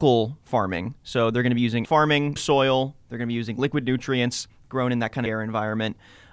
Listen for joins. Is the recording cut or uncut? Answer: cut